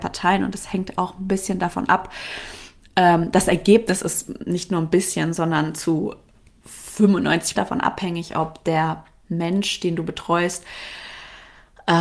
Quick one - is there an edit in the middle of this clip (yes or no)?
yes